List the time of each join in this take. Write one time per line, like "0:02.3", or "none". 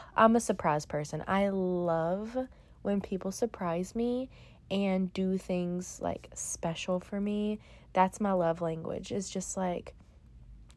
none